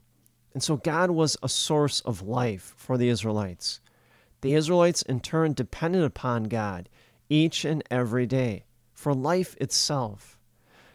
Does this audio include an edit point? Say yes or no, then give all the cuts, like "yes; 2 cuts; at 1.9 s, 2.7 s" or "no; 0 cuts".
no; 0 cuts